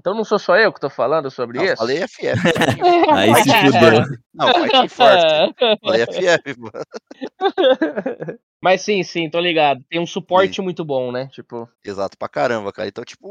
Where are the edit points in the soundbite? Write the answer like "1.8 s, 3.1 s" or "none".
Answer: 4.2 s, 8.4 s, 11.7 s